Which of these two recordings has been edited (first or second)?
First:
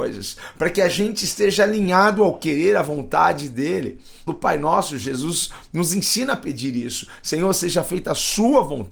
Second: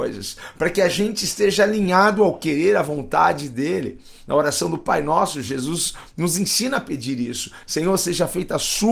first